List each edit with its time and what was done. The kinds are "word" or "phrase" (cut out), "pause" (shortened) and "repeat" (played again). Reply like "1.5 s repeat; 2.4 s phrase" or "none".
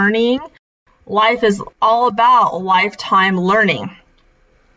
1.7 s pause